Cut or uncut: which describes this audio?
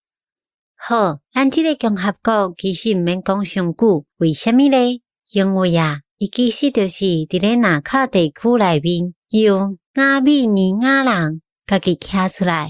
cut